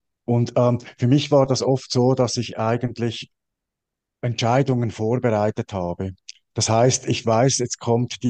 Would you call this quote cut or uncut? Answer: uncut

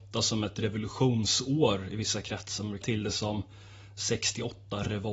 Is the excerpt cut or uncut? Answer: cut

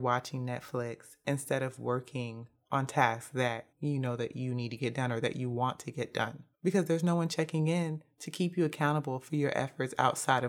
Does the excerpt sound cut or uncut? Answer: cut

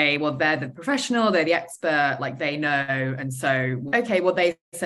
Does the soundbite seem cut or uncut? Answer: cut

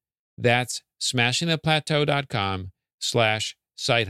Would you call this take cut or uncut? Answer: uncut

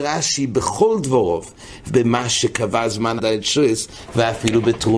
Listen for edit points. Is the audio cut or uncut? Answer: cut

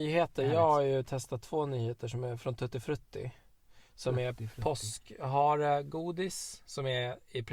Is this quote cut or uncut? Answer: uncut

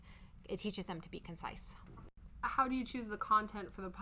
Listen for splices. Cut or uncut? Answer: uncut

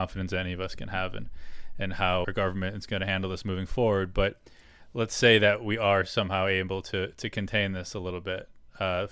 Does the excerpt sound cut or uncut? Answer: cut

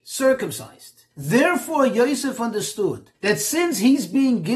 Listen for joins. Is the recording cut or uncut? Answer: cut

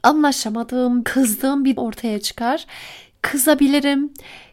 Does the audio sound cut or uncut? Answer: cut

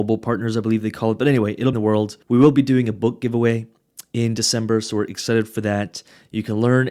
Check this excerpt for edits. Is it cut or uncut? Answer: cut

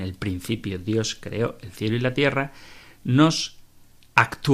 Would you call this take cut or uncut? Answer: uncut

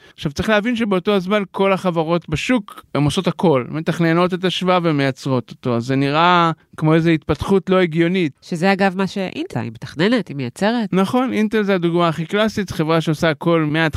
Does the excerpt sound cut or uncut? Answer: cut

